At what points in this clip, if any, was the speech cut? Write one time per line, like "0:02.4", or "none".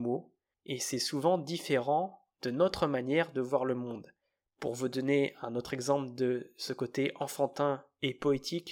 none